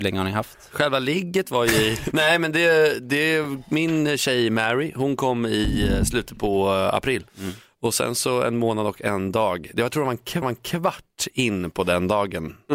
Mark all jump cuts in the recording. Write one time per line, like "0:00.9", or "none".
0:02.1
0:07.3
0:10.4